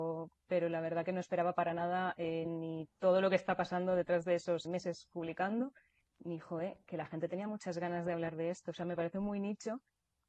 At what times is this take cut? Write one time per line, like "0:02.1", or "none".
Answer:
0:02.5
0:04.7
0:06.0

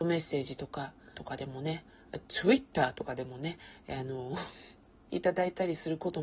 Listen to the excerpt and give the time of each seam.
0:01.1

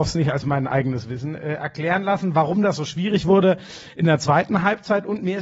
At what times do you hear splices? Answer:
none

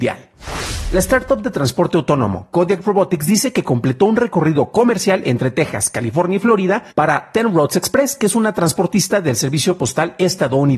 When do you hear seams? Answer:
0:06.9

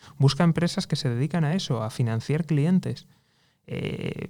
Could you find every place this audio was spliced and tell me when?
none

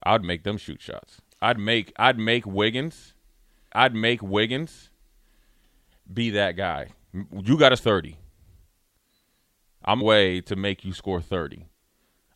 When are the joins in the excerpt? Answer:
0:01.3
0:03.7
0:07.8
0:10.0

